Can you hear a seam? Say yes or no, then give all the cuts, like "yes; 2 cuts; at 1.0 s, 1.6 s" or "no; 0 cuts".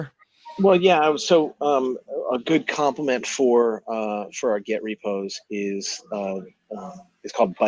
no; 0 cuts